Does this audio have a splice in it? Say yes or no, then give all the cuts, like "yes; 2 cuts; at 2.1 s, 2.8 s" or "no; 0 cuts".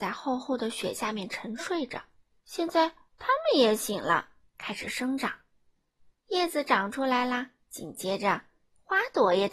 yes; 2 cuts; at 2.2 s, 7.6 s